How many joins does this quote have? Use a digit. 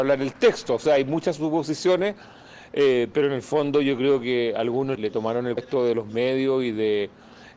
2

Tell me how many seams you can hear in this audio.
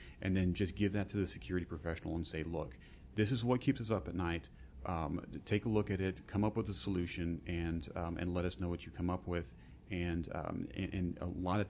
0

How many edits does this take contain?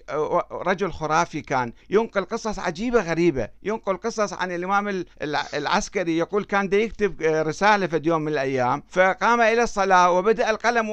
3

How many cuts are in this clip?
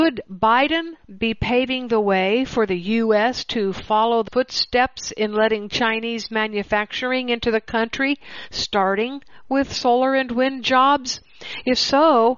1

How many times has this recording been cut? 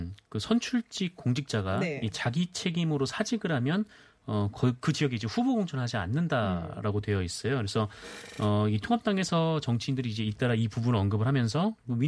0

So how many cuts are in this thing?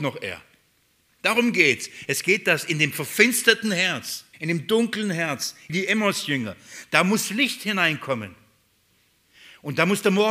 2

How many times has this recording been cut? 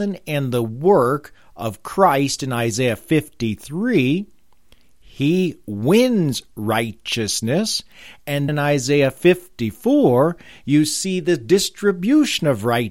1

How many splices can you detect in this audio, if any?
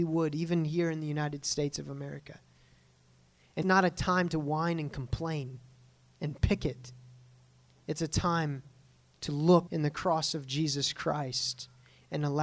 2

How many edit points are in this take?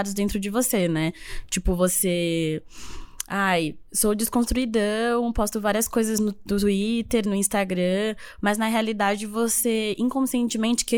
0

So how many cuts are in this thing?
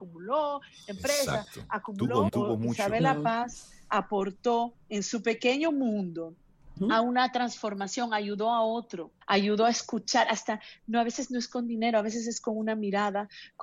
4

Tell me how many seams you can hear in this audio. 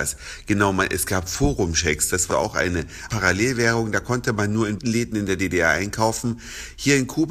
3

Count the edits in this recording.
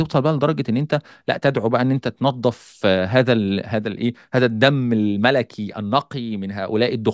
0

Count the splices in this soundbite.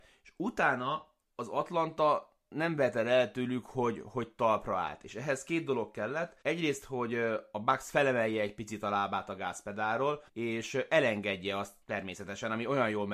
4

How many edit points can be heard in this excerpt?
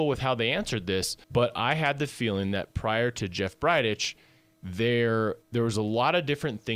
2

